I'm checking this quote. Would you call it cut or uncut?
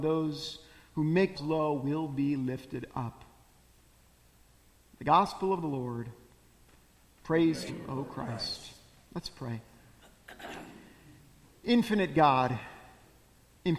cut